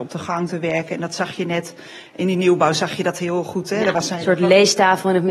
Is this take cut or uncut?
uncut